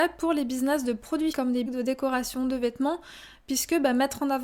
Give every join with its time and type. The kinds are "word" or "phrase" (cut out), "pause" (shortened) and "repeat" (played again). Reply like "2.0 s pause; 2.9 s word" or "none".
1.3 s word; 1.7 s phrase